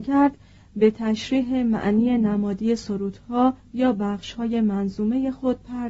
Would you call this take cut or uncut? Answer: uncut